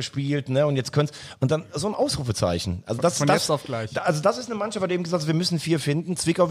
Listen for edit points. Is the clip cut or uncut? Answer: uncut